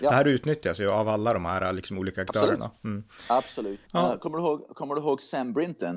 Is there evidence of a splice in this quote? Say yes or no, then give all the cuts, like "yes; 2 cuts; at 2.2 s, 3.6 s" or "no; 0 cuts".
yes; 1 cut; at 3.8 s